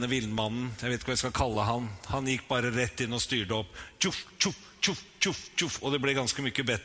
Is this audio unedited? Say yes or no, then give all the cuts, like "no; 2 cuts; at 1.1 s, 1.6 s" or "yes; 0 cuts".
yes; 0 cuts